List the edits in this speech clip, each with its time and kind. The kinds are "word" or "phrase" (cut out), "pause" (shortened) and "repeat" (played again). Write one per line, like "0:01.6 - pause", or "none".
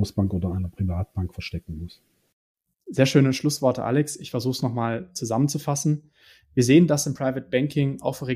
none